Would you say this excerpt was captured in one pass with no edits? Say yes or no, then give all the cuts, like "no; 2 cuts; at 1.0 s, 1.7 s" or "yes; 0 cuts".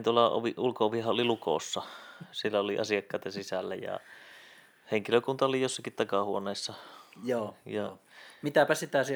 yes; 0 cuts